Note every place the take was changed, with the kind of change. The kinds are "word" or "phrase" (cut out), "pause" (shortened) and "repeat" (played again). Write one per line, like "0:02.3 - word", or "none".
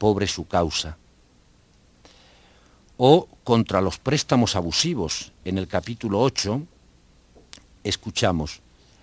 none